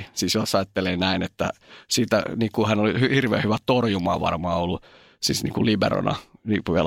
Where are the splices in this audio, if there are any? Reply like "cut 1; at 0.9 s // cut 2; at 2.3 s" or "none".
none